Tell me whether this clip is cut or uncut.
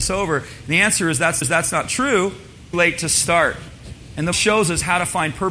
cut